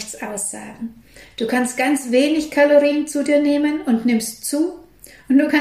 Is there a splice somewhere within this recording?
no; 0 cuts

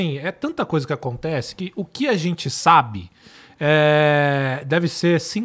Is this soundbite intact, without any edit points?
yes; 0 cuts

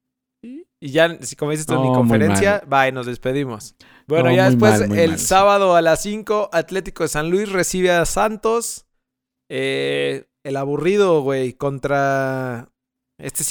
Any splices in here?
yes; 1 cut; at 3.8 s

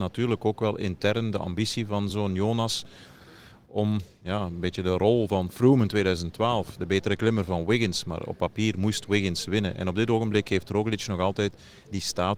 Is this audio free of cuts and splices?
yes; 0 cuts

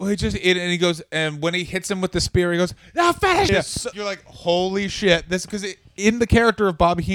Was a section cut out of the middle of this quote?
yes; 2 cuts; at 3.5 s, 3.9 s

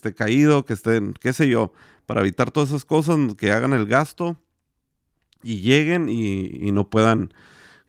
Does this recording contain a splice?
no; 0 cuts

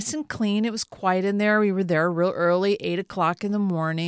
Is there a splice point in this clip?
no; 0 cuts

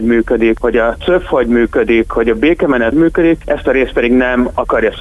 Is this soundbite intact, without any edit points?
no; 1 cut; at 2.9 s

